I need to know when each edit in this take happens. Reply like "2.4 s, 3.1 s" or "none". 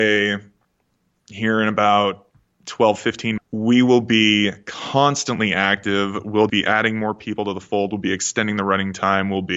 3.4 s, 6.5 s